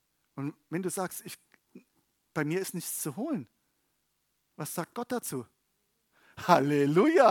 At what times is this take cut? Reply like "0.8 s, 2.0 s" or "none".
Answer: none

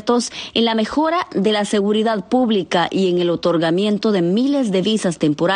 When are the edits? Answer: none

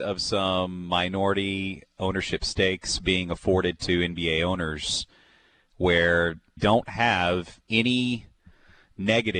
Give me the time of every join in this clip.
6.6 s, 7.6 s

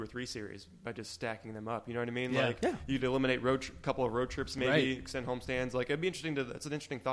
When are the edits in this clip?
none

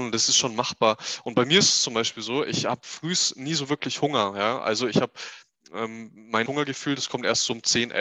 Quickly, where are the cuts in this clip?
6.5 s

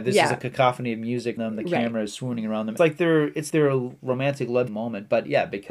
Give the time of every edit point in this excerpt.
1.4 s, 2.8 s, 3.5 s, 4.7 s

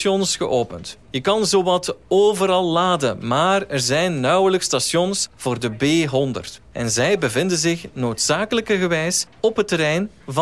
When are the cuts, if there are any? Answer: none

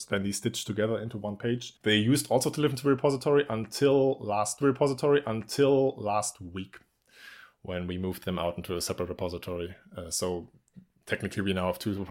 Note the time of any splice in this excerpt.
1.8 s, 4.6 s

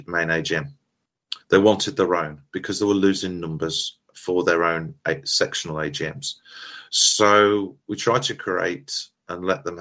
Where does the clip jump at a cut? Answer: 1.4 s

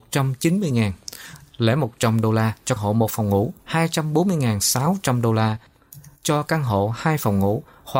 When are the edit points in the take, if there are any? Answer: 2.8 s, 3.6 s

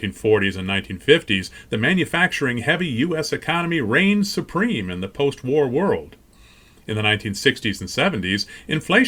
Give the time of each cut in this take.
none

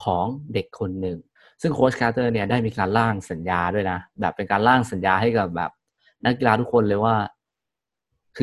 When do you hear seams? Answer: 1.4 s

